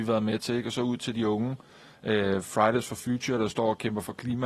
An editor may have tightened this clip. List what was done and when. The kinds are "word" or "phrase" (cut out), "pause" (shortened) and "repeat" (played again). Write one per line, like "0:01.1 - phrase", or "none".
none